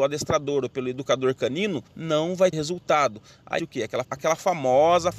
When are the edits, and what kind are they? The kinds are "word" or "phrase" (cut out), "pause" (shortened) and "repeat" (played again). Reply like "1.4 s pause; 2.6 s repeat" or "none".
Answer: 1.9 s pause; 2.5 s word; 3.6 s word; 4.0 s word